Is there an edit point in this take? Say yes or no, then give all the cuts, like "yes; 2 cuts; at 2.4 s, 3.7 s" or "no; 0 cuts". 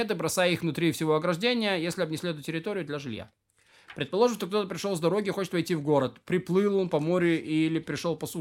no; 0 cuts